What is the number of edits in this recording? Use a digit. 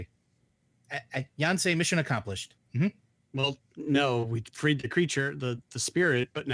1